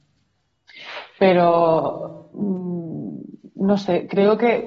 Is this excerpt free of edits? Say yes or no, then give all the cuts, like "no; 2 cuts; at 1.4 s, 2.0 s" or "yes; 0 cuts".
yes; 0 cuts